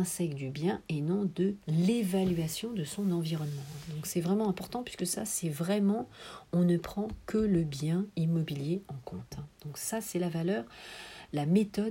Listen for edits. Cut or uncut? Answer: uncut